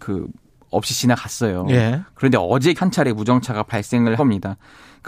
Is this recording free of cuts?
no; 2 cuts; at 2.8 s, 4.2 s

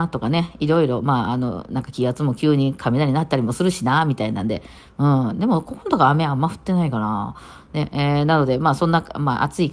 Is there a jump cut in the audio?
no; 0 cuts

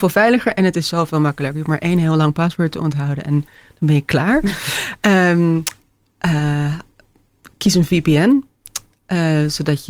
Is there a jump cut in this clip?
no; 0 cuts

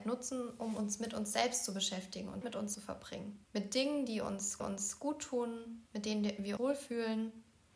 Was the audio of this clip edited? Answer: yes; 6 cuts; at 2.4 s, 2.7 s, 3.4 s, 4.6 s, 5.9 s, 6.6 s

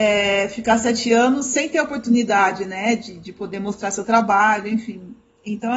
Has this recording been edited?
no; 0 cuts

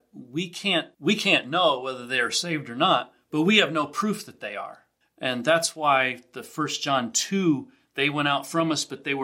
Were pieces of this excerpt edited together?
yes; 2 cuts; at 0.9 s, 5.0 s

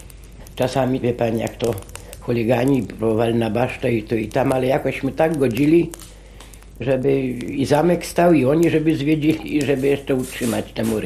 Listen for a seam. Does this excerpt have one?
yes; 1 cut; at 1.0 s

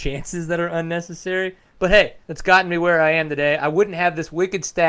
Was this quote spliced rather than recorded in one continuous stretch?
yes; 1 cut; at 2.2 s

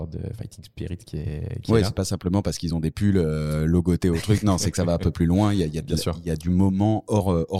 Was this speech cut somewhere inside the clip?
no; 0 cuts

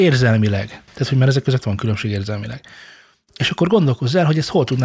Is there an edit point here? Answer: no; 0 cuts

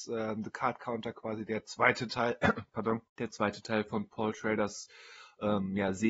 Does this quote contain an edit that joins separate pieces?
yes; 1 cut; at 3.1 s

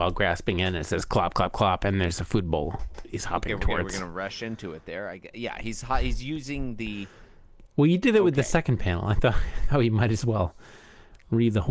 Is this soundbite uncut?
yes; 0 cuts

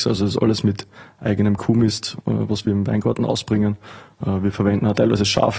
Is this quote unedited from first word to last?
yes; 0 cuts

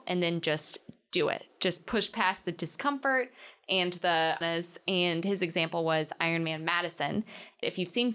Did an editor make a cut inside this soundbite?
yes; 1 cut; at 4.4 s

